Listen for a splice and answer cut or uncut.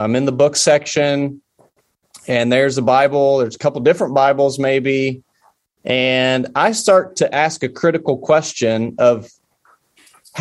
uncut